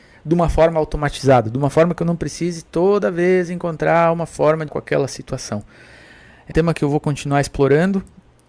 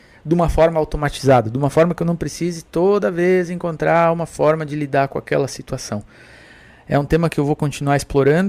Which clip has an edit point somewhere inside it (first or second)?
first